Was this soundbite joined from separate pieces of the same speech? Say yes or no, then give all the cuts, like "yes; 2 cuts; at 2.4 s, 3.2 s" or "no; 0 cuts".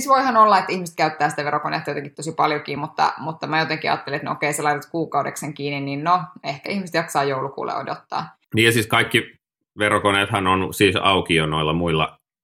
no; 0 cuts